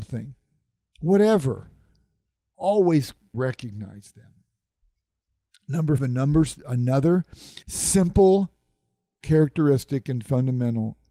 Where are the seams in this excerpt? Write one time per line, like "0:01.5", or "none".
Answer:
0:03.3
0:06.0
0:07.6